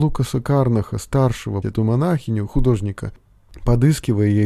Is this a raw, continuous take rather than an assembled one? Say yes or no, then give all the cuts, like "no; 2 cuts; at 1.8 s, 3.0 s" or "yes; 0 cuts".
no; 1 cut; at 1.6 s